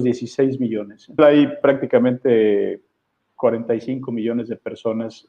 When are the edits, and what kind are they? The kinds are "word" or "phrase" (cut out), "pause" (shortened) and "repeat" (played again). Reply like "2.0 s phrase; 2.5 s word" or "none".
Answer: 1.2 s word